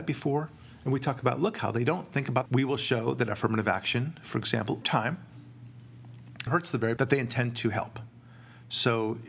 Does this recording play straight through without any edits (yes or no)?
no